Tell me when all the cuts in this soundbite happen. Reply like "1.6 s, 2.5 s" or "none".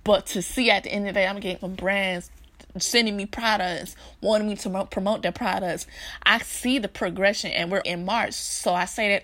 1.6 s, 7.8 s